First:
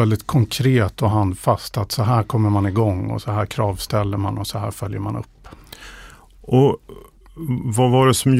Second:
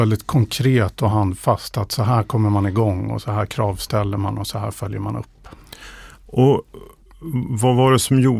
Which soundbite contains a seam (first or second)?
second